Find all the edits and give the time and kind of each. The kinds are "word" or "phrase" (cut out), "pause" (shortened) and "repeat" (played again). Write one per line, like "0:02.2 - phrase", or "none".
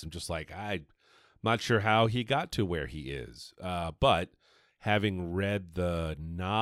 none